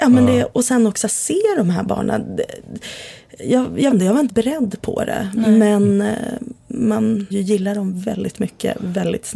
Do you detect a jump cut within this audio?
yes; 3 cuts; at 3.9 s, 4.3 s, 7.3 s

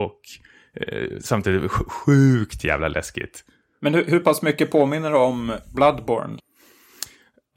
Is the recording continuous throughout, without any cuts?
yes; 0 cuts

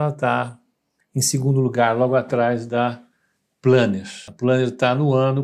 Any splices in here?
no; 0 cuts

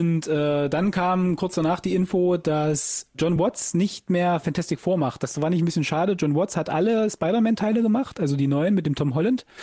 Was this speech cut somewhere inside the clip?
no; 0 cuts

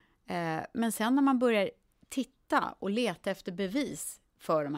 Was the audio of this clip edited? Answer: no; 0 cuts

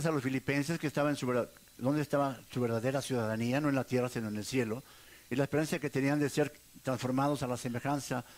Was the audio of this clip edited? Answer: no; 0 cuts

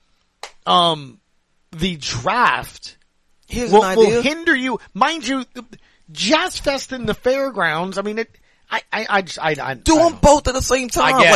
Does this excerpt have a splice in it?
no; 0 cuts

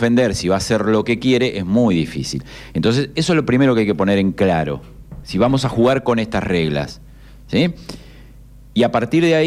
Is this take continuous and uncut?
yes; 0 cuts

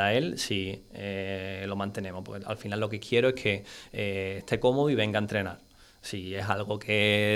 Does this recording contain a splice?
no; 0 cuts

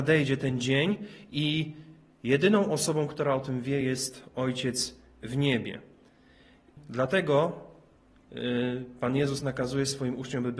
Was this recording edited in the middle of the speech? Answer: no; 0 cuts

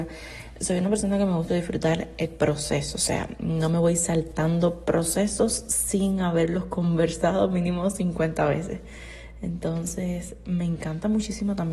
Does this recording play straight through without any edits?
no; 1 cut; at 1.5 s

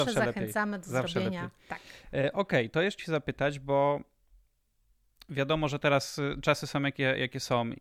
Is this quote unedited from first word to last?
no; 1 cut; at 3.0 s

